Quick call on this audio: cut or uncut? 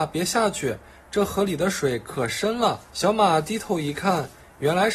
cut